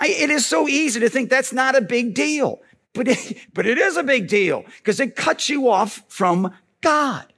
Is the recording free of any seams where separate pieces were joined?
yes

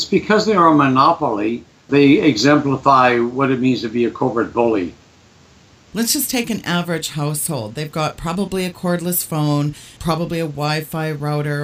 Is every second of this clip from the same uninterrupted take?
yes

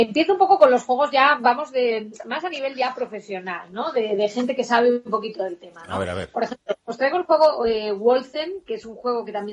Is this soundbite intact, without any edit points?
yes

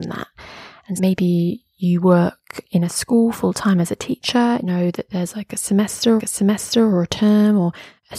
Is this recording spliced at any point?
yes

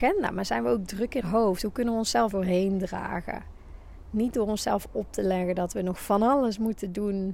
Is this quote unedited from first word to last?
no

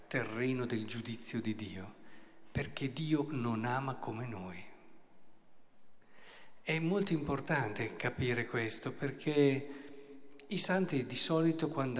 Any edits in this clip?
no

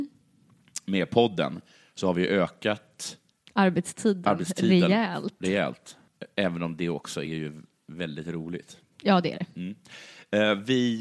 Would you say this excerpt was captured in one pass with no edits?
yes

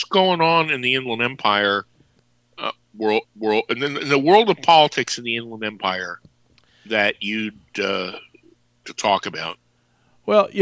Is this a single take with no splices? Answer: no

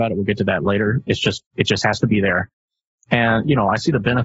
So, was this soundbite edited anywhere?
no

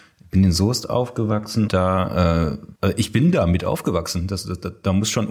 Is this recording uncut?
no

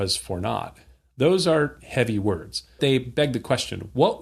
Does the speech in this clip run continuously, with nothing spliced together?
no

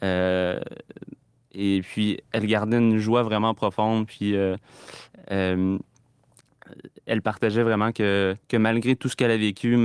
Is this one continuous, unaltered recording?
no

